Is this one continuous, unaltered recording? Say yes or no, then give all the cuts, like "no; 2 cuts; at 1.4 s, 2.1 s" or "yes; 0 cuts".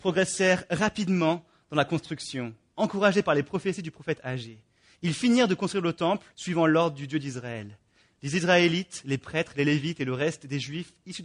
no; 1 cut; at 6.3 s